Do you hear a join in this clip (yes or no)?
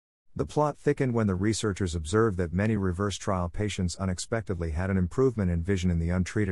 no